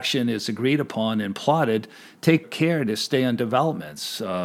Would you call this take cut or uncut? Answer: cut